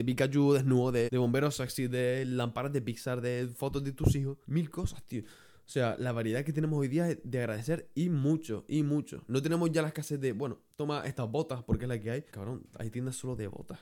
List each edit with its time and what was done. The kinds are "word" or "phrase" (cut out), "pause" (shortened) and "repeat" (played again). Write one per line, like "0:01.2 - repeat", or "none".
0:01.1 - word
0:04.4 - pause
0:12.3 - pause